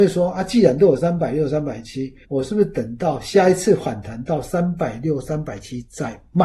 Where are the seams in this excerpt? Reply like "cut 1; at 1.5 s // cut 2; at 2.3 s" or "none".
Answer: cut 1; at 2.2 s